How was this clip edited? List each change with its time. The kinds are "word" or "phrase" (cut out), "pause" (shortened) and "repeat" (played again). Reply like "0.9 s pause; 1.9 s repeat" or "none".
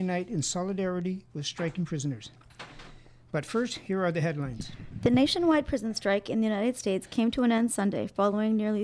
none